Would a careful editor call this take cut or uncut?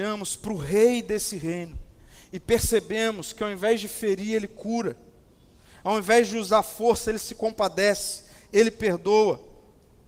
uncut